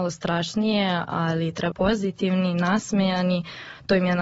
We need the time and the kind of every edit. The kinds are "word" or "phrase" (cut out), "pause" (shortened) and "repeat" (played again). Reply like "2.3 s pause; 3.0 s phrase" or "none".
1.7 s phrase